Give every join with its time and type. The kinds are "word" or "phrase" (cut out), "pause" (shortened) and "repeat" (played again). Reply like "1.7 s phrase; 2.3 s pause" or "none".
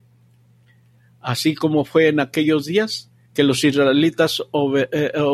none

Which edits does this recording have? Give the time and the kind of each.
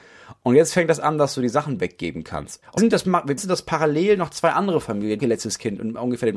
2.8 s word; 3.4 s word; 5.2 s phrase

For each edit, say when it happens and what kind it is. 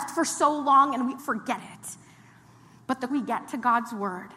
1.2 s word; 1.6 s word; 3.1 s word

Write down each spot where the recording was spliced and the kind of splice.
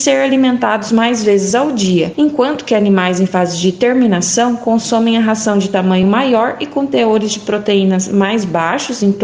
none

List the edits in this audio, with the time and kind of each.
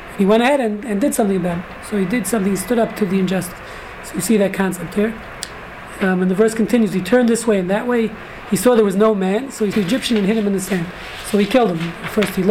9.7 s word

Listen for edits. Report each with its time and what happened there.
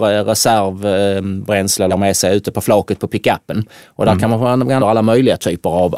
1.9 s word; 4.8 s word

